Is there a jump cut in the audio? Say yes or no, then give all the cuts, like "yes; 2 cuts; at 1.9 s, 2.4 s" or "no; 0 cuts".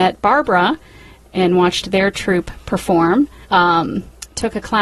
yes; 1 cut; at 3.4 s